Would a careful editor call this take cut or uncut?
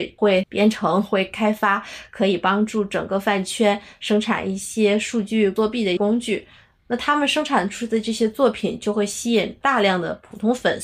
uncut